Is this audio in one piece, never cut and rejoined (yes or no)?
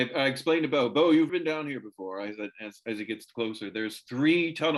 no